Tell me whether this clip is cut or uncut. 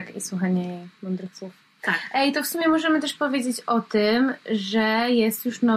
uncut